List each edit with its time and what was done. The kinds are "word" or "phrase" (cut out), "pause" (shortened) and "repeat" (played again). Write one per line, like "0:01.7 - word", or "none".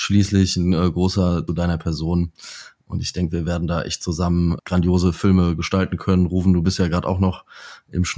0:01.5 - phrase
0:04.6 - word